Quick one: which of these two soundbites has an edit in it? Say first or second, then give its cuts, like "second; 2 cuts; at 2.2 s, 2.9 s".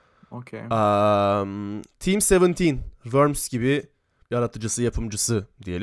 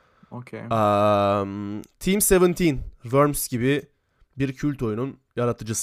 first; 1 cut; at 4.2 s